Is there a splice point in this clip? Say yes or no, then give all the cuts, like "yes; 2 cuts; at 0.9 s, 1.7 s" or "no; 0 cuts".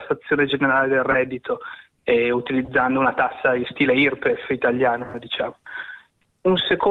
no; 0 cuts